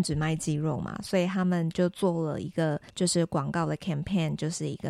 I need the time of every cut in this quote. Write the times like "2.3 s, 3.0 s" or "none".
2.9 s